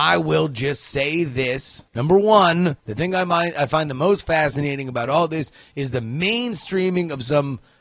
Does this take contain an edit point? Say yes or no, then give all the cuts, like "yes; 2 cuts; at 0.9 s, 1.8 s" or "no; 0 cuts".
yes; 2 cuts; at 1.9 s, 2.8 s